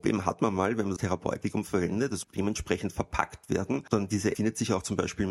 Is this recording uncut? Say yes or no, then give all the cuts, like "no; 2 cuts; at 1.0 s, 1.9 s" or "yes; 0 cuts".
no; 3 cuts; at 1.0 s, 2.2 s, 4.3 s